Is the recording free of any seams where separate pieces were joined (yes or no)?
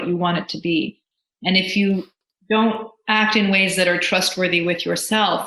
yes